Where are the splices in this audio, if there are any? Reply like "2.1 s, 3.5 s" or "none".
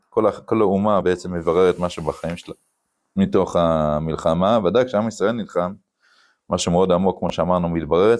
none

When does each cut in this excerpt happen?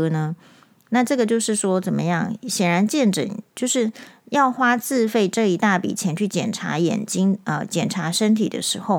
3.5 s

